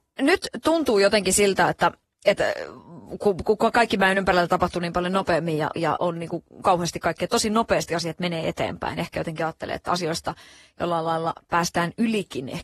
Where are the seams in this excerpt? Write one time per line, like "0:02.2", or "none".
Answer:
none